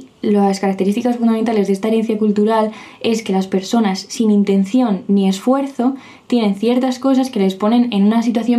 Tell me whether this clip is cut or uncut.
uncut